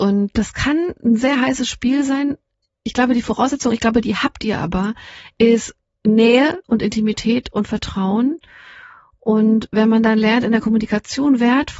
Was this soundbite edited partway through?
no; 0 cuts

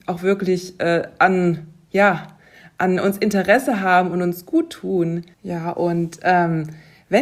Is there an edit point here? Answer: yes; 1 cut; at 5.3 s

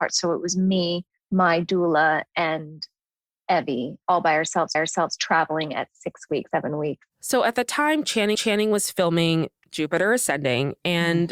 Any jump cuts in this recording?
yes; 6 cuts; at 1.2 s, 4.0 s, 4.7 s, 6.5 s, 7.1 s, 8.3 s

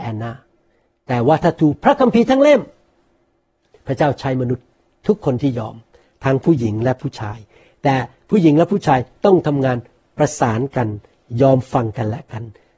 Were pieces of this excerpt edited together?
no; 0 cuts

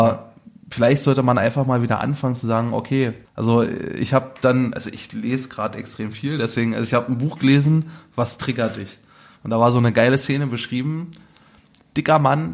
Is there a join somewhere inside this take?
yes; 1 cut; at 3.2 s

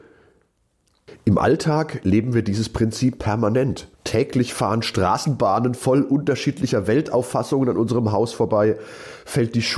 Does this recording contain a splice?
yes; 1 cut; at 3.9 s

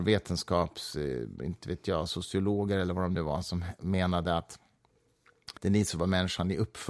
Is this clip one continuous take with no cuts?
no; 1 cut; at 5.6 s

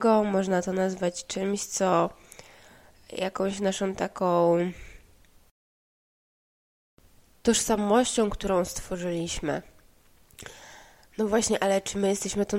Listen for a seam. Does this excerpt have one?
no; 0 cuts

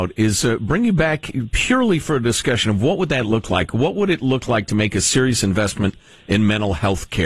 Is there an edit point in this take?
no; 0 cuts

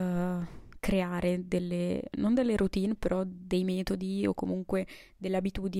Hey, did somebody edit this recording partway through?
no; 0 cuts

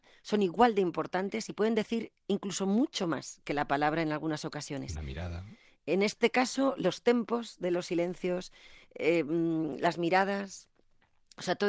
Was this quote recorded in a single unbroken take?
yes; 0 cuts

